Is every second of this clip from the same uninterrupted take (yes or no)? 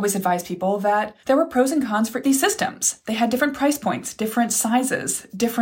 no